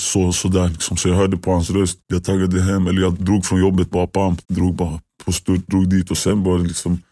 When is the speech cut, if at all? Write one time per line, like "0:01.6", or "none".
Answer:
0:02.0
0:04.4